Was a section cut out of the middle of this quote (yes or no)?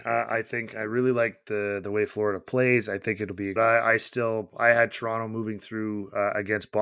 yes